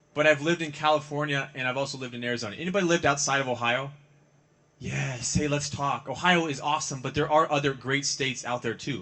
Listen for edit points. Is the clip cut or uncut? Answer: uncut